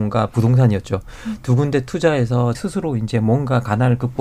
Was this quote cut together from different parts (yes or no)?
yes